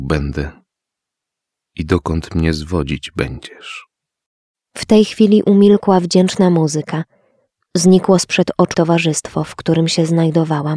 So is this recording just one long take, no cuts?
no; 1 cut; at 8.7 s

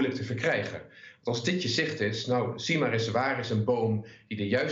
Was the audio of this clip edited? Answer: no; 0 cuts

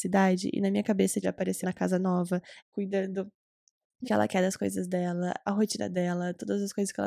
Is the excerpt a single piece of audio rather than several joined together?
no; 5 cuts; at 1.2 s, 1.6 s, 2.6 s, 4.0 s, 5.5 s

